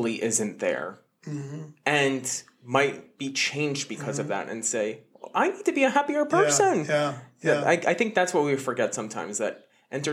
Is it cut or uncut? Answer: uncut